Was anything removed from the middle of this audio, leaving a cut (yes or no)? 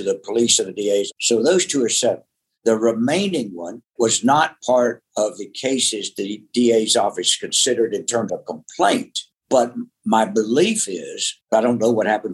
yes